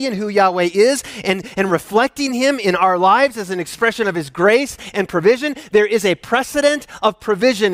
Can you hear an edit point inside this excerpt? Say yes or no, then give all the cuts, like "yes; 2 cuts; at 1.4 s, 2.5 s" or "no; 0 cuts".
no; 0 cuts